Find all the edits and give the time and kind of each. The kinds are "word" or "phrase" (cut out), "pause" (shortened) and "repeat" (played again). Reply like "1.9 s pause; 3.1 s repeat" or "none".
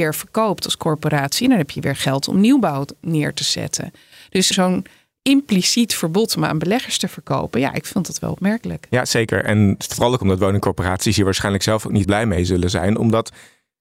4.5 s word; 12.0 s word